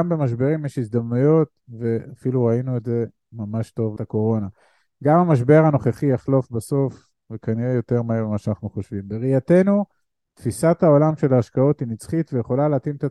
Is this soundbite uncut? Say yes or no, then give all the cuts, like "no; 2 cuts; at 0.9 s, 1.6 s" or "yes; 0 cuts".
no; 1 cut; at 4.0 s